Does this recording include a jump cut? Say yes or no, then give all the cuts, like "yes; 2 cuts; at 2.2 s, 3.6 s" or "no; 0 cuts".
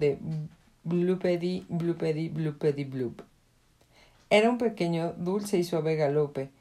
no; 0 cuts